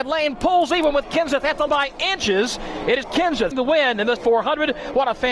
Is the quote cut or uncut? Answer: cut